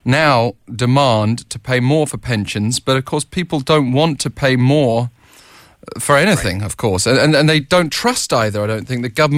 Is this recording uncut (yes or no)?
yes